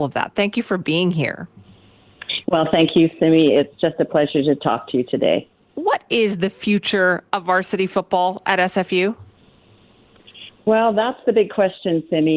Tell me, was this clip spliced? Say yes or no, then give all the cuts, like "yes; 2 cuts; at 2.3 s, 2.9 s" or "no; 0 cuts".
no; 0 cuts